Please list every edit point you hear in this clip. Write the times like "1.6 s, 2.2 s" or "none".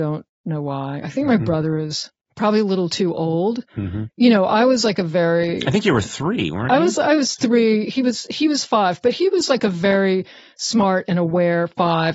none

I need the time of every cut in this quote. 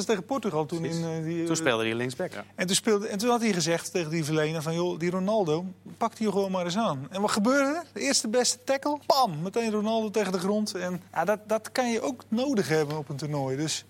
9.0 s, 11.1 s

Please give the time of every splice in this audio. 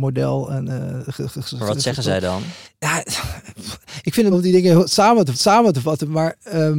2.6 s, 4.3 s, 5.3 s

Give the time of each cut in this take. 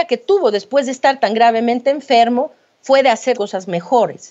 3.3 s

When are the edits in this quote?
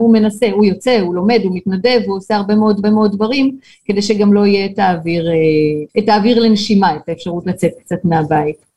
2.8 s, 5.9 s

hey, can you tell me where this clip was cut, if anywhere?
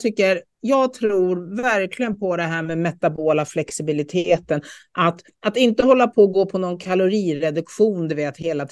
none

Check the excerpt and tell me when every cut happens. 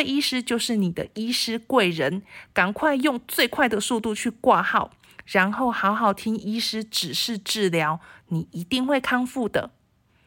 none

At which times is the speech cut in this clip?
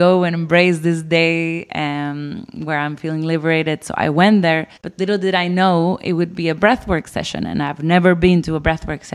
4.8 s

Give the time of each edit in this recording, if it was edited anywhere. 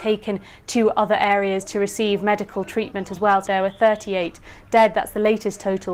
3.5 s

